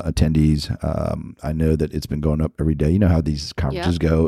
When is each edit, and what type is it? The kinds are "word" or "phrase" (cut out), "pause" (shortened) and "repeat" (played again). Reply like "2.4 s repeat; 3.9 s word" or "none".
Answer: none